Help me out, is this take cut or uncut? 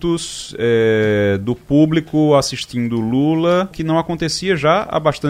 cut